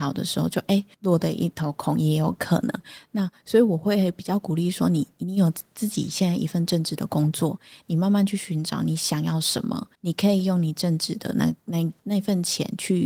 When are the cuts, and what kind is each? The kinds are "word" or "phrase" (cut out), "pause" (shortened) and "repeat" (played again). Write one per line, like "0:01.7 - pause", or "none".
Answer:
0:00.9 - pause
0:09.9 - pause